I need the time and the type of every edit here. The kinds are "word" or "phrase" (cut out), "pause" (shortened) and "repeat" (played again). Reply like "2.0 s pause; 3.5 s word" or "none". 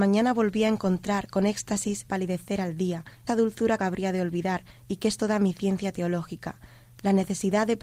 2.1 s phrase; 3.3 s word; 3.8 s phrase